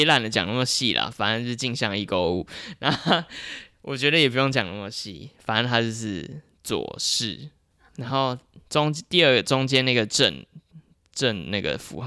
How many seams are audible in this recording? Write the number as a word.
one